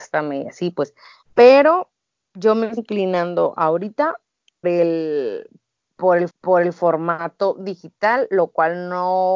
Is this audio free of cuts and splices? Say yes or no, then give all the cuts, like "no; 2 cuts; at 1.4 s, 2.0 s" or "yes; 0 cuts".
no; 4 cuts; at 1.2 s, 2.8 s, 4.6 s, 6.3 s